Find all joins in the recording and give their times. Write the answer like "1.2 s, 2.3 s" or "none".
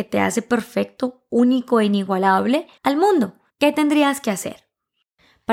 2.8 s, 3.5 s

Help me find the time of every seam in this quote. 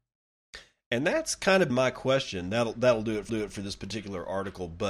1.7 s, 3.3 s

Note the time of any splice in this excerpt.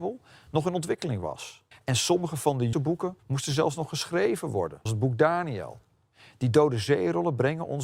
1.7 s, 2.7 s, 3.2 s, 4.9 s

